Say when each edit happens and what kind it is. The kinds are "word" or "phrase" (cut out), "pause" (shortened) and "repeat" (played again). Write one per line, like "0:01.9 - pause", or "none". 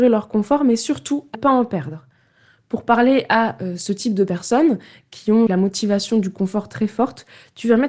0:01.3 - word
0:05.5 - word